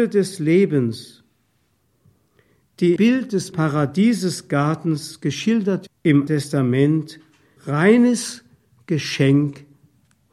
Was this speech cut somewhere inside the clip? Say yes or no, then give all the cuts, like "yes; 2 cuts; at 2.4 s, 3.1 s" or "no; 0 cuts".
yes; 5 cuts; at 3.0 s, 3.5 s, 5.9 s, 6.3 s, 7.6 s